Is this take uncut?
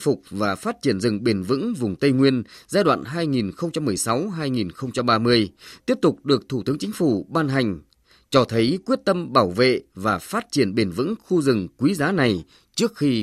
yes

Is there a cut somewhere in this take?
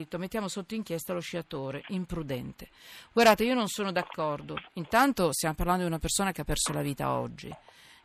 yes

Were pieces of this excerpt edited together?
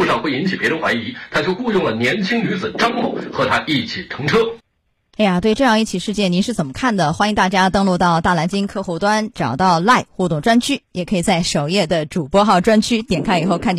no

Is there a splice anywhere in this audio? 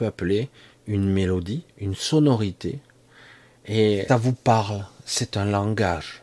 yes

